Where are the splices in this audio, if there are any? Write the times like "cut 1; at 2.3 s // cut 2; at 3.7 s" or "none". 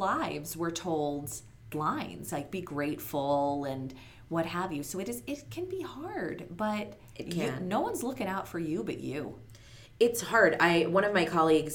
cut 1; at 1.7 s